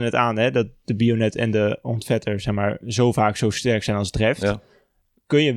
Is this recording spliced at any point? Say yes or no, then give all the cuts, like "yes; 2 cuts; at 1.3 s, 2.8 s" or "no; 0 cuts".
no; 0 cuts